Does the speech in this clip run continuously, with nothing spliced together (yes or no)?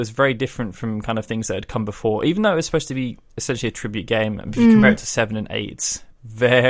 yes